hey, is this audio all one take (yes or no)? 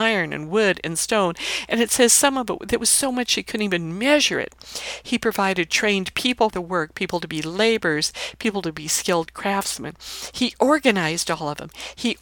no